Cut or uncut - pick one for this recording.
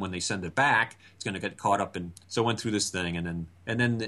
cut